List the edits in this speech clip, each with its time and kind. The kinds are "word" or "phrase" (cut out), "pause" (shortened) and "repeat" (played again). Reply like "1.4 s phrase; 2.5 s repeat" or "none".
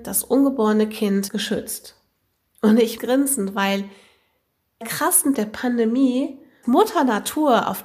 1.3 s word; 3.0 s word; 4.8 s word; 5.3 s word; 6.6 s word

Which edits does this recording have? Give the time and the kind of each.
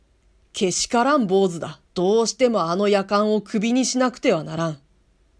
1.8 s pause

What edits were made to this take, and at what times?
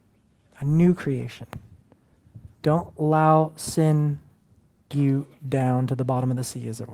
2.5 s pause; 4.9 s word

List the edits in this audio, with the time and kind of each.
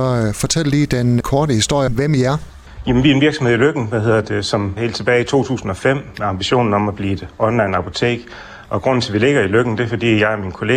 1.2 s word; 1.9 s word; 4.8 s word

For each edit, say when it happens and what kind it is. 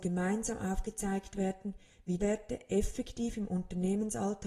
2.2 s word

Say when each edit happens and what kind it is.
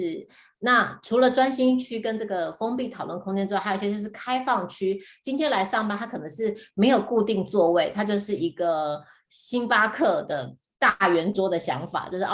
none

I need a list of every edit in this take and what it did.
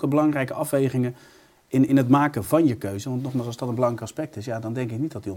none

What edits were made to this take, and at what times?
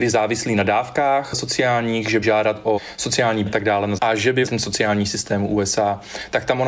2.2 s word; 3.5 s word; 4.0 s word; 4.5 s word

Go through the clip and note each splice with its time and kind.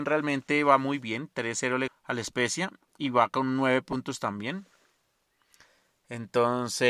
1.9 s word

